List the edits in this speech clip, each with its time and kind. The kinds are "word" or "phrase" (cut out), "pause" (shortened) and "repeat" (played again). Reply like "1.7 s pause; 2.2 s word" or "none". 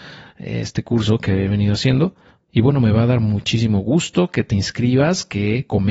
none